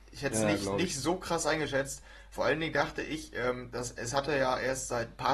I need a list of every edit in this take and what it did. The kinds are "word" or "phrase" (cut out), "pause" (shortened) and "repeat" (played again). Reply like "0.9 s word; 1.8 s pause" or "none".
none